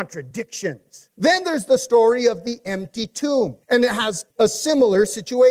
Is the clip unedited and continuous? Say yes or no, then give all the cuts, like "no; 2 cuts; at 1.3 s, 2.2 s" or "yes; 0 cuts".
no; 3 cuts; at 1.1 s, 3.6 s, 4.3 s